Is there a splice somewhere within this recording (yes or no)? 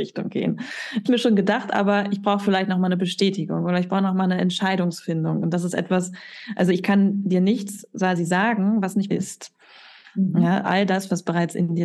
yes